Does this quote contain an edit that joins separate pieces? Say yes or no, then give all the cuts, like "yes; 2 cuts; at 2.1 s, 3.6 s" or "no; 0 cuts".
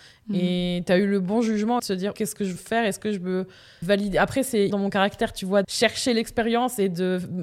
yes; 6 cuts; at 1.8 s, 2.1 s, 2.6 s, 3.8 s, 4.7 s, 5.6 s